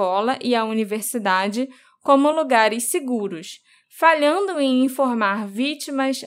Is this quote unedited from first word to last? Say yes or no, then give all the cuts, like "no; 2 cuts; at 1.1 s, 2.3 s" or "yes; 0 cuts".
yes; 0 cuts